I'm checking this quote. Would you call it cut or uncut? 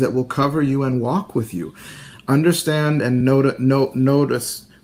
uncut